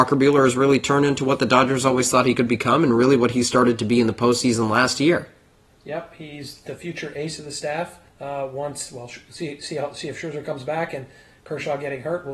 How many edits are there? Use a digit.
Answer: 1